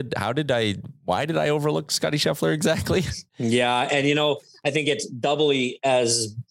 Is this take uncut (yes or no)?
no